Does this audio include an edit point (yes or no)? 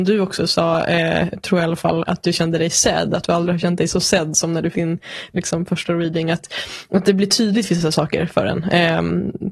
yes